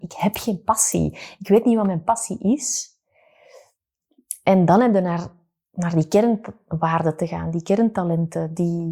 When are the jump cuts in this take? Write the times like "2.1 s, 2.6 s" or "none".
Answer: none

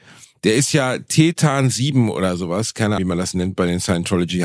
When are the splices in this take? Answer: 3.0 s

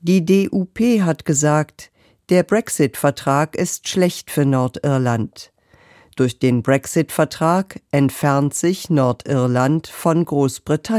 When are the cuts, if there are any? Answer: none

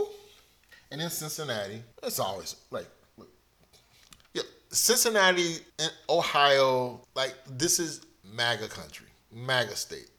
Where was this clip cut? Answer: 1.9 s, 4.2 s, 5.7 s, 7.0 s

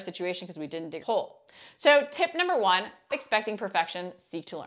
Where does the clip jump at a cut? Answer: 1.0 s, 3.1 s

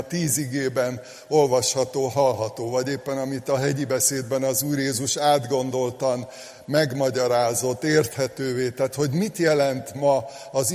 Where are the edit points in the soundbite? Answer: none

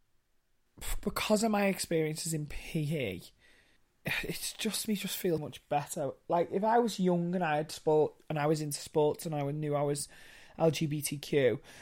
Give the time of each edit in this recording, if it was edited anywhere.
4.9 s, 5.4 s

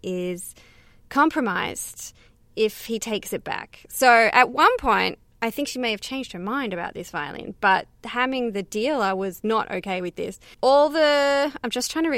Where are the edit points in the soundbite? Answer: none

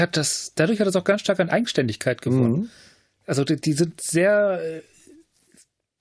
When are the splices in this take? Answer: none

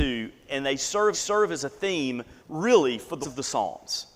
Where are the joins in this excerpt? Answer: 1.1 s, 2.4 s, 3.2 s

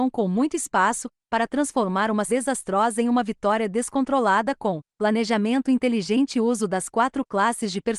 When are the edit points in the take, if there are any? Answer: 2.3 s

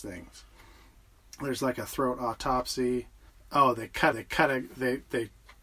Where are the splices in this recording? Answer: 3.3 s, 4.1 s

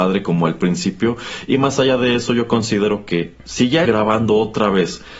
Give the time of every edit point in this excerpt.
3.8 s

